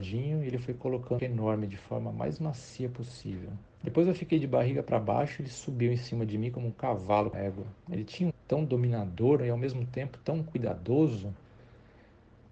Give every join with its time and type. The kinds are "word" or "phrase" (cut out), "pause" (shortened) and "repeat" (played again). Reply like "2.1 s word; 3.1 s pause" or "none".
1.2 s phrase; 3.7 s pause; 7.3 s phrase; 7.8 s pause; 8.3 s phrase